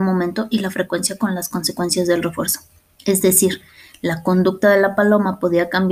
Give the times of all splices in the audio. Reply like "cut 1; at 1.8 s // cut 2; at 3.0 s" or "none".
none